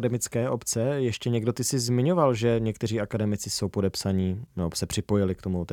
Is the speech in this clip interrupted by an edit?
no; 0 cuts

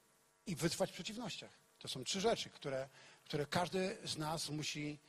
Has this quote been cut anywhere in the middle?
yes; 1 cut; at 1.7 s

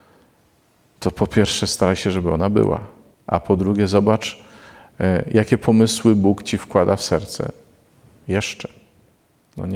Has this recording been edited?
yes; 1 cut; at 3.1 s

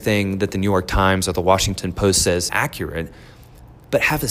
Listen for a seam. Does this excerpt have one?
yes; 1 cut; at 2.5 s

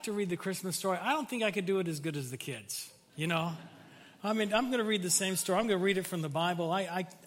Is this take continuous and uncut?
yes; 0 cuts

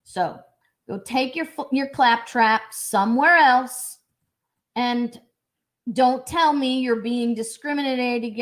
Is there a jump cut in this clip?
no; 0 cuts

